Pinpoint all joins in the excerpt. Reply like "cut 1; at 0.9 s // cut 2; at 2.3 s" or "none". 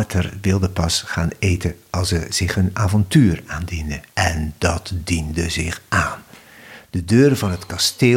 cut 1; at 4.1 s